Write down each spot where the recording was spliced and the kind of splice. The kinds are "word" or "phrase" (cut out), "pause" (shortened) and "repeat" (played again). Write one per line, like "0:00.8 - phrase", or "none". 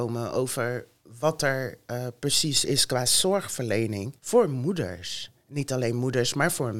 0:04.2 - pause